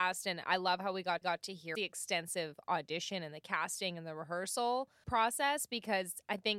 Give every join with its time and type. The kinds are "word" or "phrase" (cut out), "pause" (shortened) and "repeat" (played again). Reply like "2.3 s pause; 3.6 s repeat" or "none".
1.2 s repeat; 1.8 s phrase; 5.0 s word